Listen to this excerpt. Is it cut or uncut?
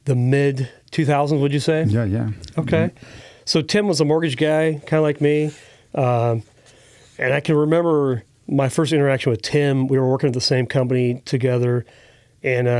uncut